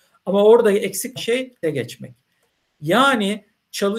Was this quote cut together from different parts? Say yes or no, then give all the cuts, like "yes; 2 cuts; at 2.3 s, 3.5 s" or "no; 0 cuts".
yes; 2 cuts; at 1.2 s, 1.6 s